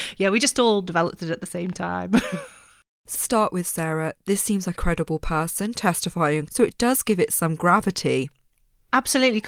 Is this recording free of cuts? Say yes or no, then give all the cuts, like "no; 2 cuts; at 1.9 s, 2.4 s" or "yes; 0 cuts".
no; 3 cuts; at 3.1 s, 4.8 s, 6.5 s